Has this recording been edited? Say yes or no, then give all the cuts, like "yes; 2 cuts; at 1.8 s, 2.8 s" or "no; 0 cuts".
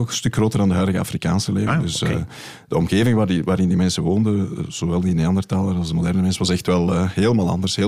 no; 0 cuts